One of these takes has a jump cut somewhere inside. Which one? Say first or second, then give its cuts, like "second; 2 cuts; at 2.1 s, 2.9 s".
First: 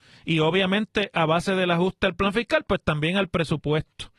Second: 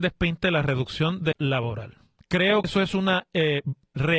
second; 2 cuts; at 1.3 s, 2.6 s